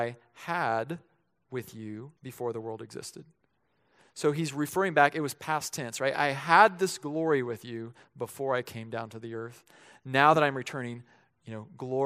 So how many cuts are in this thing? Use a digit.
1